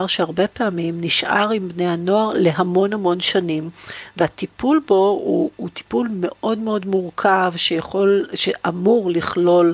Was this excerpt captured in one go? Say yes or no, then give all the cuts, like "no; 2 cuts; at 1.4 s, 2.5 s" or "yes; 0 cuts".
yes; 0 cuts